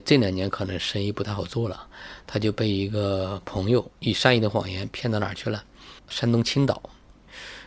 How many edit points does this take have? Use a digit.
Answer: 2